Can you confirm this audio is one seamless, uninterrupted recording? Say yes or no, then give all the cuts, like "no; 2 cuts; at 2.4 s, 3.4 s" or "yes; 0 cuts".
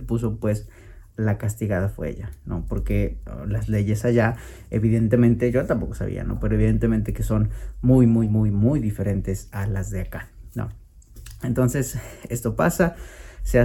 yes; 0 cuts